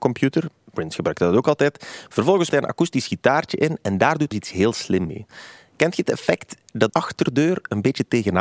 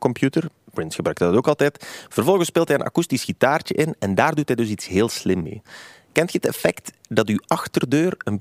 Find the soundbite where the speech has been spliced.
first; 3 cuts; at 2.5 s, 4.3 s, 6.9 s

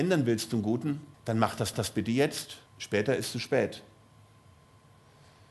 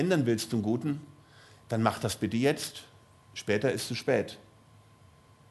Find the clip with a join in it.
first; 3 cuts; at 1.1 s, 1.7 s, 2.7 s

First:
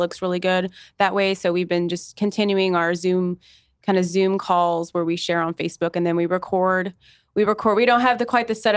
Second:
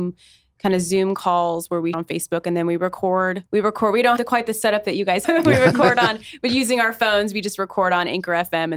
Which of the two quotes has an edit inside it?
second; 4 cuts; at 1.9 s, 3.5 s, 4.2 s, 5.2 s

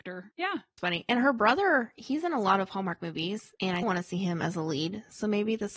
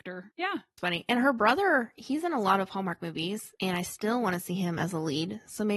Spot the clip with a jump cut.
first; 1 cut; at 3.8 s

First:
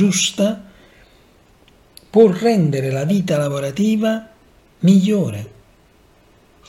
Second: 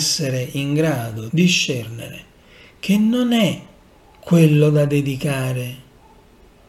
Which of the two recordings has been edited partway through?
second; 2 cuts; at 1.3 s, 3.9 s

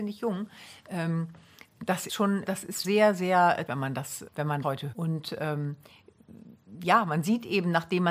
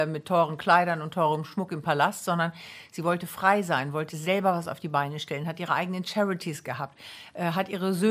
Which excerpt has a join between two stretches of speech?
first; 7 cuts; at 2.1 s, 2.4 s, 2.8 s, 3.7 s, 4.3 s, 4.6 s, 4.9 s

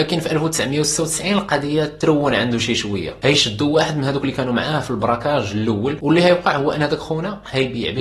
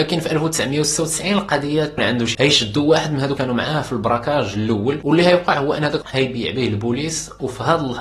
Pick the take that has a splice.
second; 4 cuts; at 2.0 s, 2.3 s, 3.4 s, 6.0 s

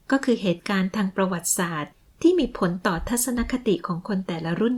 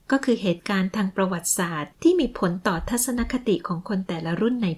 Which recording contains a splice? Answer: second; 1 cut; at 1.9 s

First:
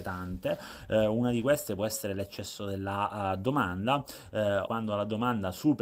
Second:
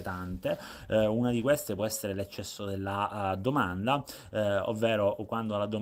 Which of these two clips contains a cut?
first; 1 cut; at 4.7 s

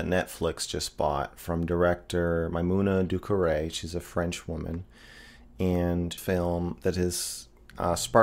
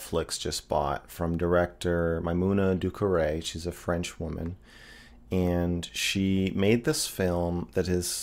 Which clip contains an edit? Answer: first; 1 cut; at 6.2 s

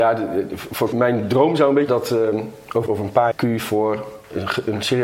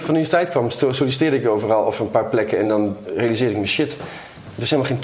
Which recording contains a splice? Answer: first; 4 cuts; at 0.9 s, 1.9 s, 2.9 s, 3.3 s

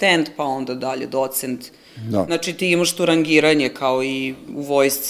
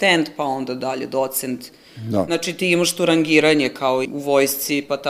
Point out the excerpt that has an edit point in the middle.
second; 1 cut; at 4.0 s

